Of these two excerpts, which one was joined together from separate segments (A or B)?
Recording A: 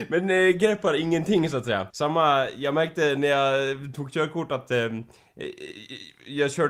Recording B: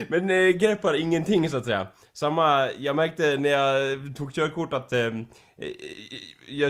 A